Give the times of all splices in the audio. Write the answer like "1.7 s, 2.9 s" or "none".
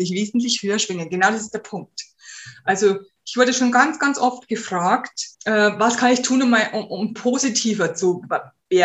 5.3 s, 7.2 s